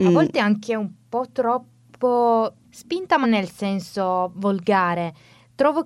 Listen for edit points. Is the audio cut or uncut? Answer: cut